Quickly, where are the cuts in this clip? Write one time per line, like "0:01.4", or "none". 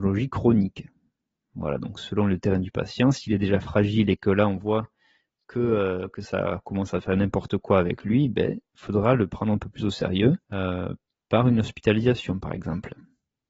0:10.4